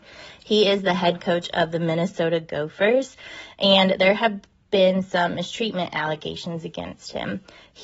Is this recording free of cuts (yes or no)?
no